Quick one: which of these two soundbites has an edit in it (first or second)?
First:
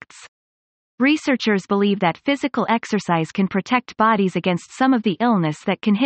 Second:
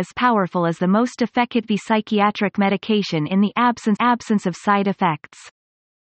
second